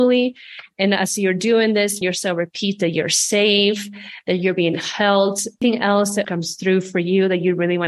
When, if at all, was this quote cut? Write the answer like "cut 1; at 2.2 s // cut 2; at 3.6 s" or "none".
cut 1; at 2.0 s // cut 2; at 6.2 s